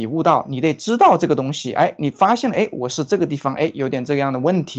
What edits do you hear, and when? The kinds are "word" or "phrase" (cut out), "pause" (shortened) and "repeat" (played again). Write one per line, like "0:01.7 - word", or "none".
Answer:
none